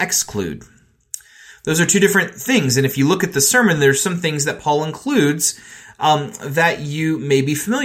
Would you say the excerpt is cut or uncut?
uncut